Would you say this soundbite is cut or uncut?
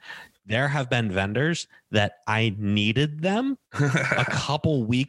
cut